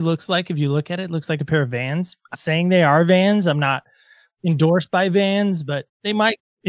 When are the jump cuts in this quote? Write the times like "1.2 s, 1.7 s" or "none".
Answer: 2.3 s